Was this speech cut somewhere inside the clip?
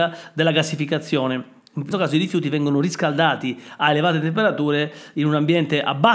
yes; 1 cut; at 1.9 s

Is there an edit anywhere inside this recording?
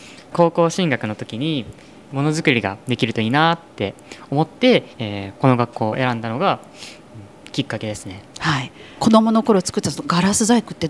yes; 1 cut; at 4.9 s

